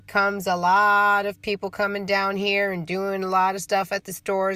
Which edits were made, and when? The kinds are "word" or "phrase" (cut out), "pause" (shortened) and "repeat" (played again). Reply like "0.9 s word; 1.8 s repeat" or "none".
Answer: none

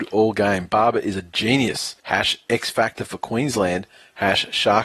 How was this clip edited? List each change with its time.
2.0 s pause

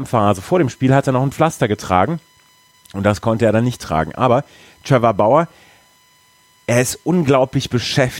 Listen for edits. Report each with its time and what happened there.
none

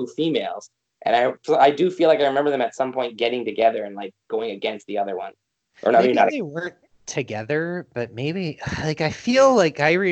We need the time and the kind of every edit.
none

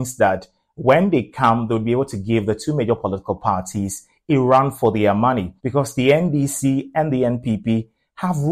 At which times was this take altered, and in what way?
5.6 s pause

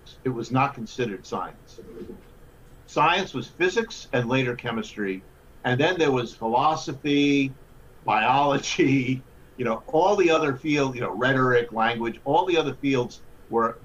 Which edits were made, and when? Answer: none

